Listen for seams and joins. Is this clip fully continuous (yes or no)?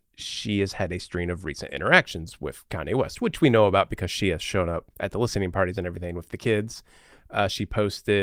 no